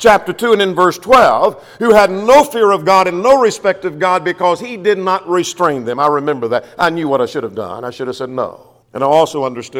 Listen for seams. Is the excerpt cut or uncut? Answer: cut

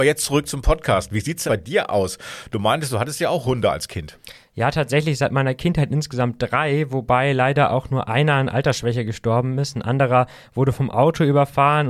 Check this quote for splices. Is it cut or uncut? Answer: cut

